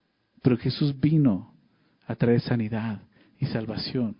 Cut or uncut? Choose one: uncut